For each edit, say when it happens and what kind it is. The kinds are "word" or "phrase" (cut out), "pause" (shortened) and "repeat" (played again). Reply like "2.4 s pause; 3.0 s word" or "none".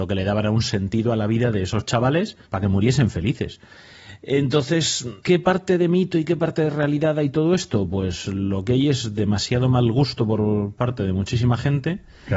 2.4 s pause; 5.2 s pause